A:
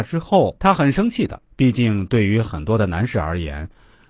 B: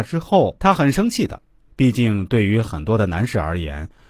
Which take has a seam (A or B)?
A